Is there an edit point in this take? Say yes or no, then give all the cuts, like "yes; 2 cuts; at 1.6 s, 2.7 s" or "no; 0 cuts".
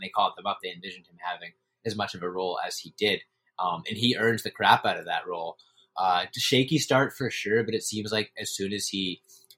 no; 0 cuts